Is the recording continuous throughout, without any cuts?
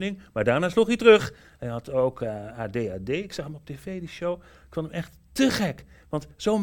yes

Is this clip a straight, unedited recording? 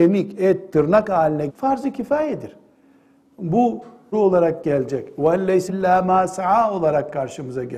no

